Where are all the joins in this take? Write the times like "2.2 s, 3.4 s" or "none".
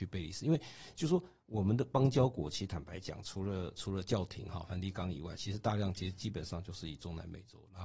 none